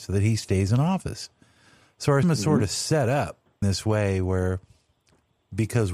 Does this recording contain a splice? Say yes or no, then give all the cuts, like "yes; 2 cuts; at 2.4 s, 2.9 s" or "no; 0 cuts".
yes; 2 cuts; at 2.2 s, 3.6 s